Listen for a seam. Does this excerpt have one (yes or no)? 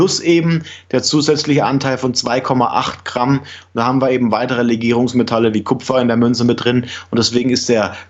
no